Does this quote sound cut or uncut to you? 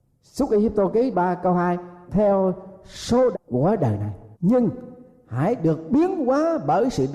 cut